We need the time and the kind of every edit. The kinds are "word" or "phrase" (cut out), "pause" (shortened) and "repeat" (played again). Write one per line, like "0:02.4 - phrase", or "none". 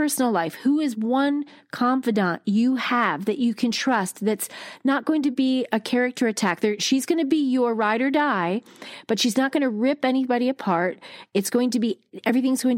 none